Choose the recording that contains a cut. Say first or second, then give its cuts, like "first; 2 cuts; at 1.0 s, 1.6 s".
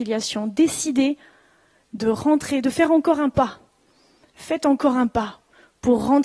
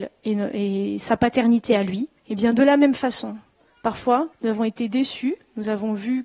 second; 2 cuts; at 2.2 s, 4.3 s